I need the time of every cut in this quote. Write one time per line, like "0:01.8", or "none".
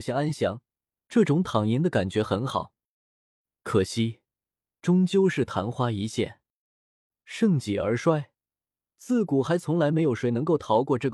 none